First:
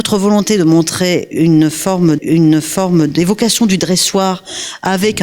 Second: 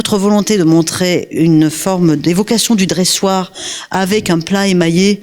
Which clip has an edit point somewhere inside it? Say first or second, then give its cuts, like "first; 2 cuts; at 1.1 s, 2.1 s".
first; 1 cut; at 2.2 s